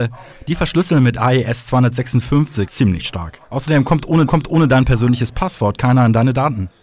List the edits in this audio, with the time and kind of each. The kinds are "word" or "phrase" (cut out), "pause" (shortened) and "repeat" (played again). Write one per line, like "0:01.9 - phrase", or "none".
0:02.7 - phrase
0:03.4 - pause
0:04.3 - repeat